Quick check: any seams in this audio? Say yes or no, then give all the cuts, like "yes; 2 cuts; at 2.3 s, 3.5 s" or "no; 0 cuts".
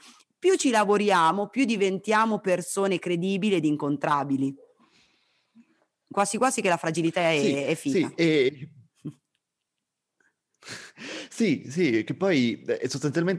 no; 0 cuts